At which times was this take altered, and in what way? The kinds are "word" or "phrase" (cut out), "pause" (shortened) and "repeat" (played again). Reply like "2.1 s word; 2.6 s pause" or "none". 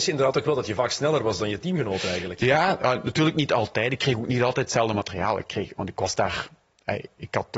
none